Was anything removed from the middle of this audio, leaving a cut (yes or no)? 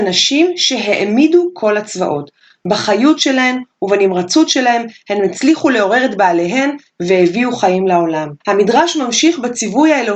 yes